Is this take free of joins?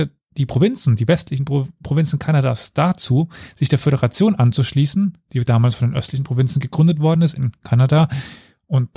yes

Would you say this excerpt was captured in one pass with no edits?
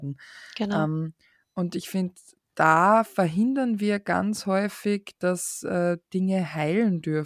yes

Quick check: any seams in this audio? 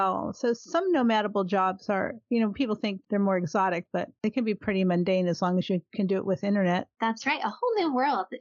no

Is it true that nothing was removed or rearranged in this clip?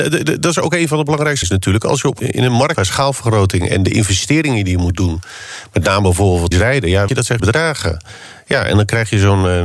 no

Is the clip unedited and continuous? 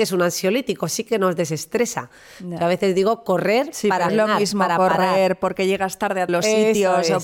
no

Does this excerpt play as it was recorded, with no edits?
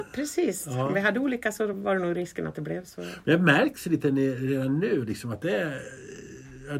yes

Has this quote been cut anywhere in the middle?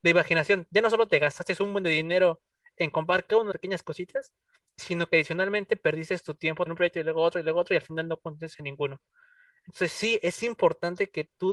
yes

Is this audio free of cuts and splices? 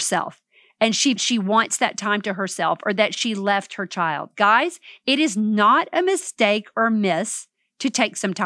no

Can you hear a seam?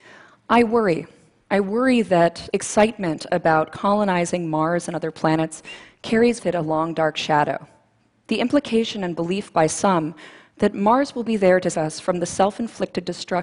yes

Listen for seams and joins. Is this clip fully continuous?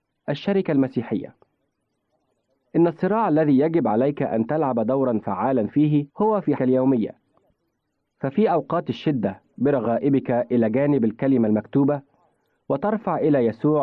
no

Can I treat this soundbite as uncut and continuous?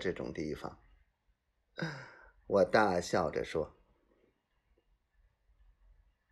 yes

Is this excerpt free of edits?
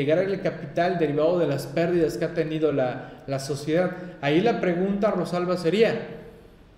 yes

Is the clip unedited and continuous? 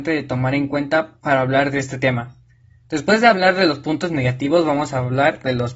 yes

